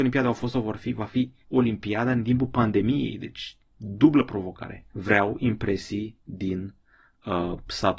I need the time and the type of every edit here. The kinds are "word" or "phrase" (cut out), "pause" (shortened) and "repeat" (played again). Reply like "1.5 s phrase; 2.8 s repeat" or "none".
1.4 s pause; 4.9 s pause